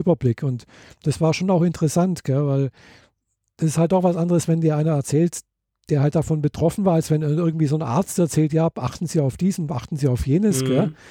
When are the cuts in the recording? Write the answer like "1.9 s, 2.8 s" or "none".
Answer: none